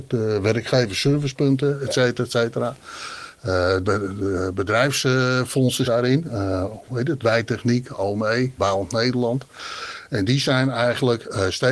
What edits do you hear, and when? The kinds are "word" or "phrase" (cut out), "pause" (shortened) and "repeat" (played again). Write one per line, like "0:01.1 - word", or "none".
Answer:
0:03.8 - word
0:05.8 - word
0:08.6 - word